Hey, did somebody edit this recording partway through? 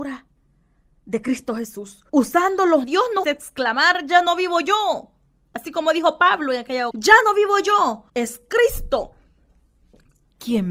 yes; 5 cuts; at 2.1 s, 2.8 s, 3.2 s, 6.9 s, 8.1 s

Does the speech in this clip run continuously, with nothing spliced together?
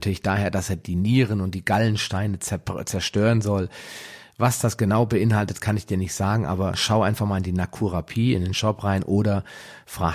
yes; 0 cuts

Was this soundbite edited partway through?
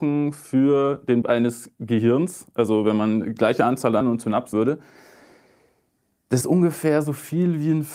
yes; 5 cuts; at 1.2 s, 3.4 s, 4.0 s, 4.5 s, 6.4 s

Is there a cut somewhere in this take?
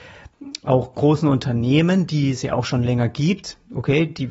no; 0 cuts

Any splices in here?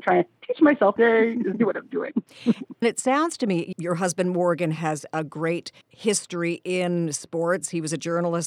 yes; 5 cuts; at 1.0 s, 1.6 s, 2.8 s, 3.7 s, 5.8 s

